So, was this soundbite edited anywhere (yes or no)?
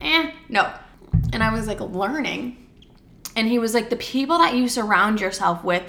no